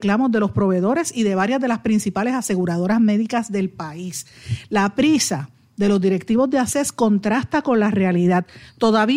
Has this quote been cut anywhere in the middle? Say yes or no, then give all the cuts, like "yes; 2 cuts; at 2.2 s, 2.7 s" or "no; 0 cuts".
no; 0 cuts